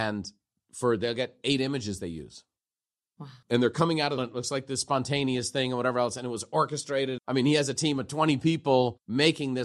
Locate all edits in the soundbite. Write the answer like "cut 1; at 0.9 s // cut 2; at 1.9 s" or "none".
cut 1; at 3.4 s // cut 2; at 4.2 s // cut 3; at 7.2 s